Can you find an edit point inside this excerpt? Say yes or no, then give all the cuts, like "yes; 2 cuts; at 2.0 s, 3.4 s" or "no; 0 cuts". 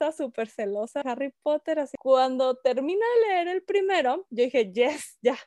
yes; 1 cut; at 1.0 s